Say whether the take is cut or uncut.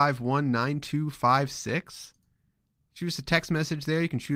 uncut